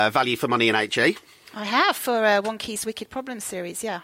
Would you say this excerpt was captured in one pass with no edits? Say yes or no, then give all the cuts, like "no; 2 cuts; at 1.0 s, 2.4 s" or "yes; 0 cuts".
yes; 0 cuts